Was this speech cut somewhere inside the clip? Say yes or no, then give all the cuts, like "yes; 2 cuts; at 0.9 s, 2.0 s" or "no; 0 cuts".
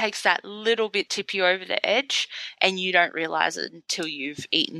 yes; 1 cut; at 1.1 s